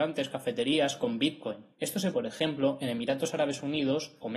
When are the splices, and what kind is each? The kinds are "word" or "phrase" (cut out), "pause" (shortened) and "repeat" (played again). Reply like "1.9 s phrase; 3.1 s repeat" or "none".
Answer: 1.0 s phrase; 1.7 s pause; 2.1 s phrase